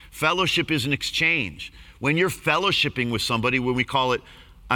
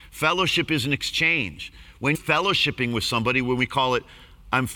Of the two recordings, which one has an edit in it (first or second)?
second